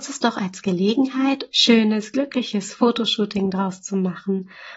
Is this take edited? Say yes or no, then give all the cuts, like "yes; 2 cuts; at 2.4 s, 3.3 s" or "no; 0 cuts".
yes; 1 cut; at 1.5 s